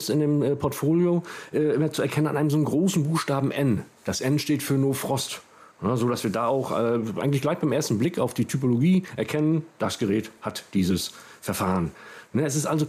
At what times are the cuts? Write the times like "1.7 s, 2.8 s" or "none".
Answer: none